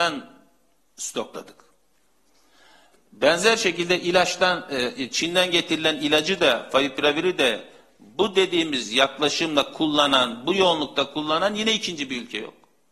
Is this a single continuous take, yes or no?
yes